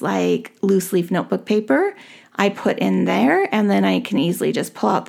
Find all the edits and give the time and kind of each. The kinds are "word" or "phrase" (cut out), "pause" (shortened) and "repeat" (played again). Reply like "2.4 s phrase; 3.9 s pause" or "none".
none